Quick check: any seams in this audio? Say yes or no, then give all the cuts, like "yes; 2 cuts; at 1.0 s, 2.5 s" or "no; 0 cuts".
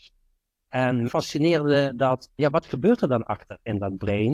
yes; 2 cuts; at 1.1 s, 2.4 s